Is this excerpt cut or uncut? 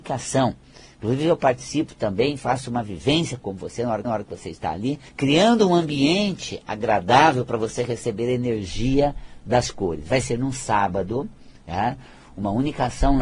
cut